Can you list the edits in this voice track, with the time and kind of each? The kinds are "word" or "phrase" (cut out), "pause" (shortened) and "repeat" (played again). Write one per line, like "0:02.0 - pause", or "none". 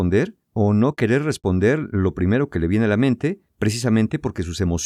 none